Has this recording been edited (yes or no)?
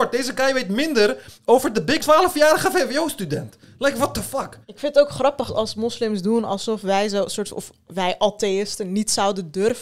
yes